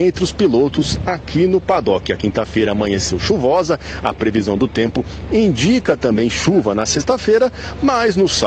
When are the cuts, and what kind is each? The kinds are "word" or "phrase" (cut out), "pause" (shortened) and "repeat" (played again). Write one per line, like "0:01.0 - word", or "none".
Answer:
none